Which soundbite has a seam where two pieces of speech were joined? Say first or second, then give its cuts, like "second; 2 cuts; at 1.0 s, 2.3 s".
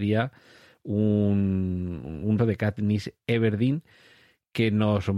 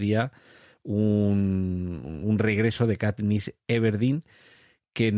first; 1 cut; at 2.4 s